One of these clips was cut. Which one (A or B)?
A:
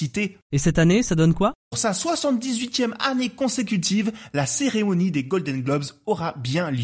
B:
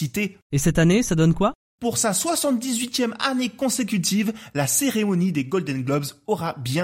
A